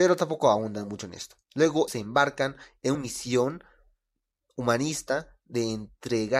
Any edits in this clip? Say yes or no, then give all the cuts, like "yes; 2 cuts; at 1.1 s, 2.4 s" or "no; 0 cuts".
yes; 2 cuts; at 1.9 s, 2.9 s